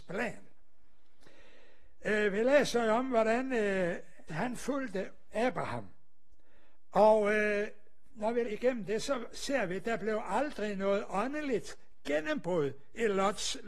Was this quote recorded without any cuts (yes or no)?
no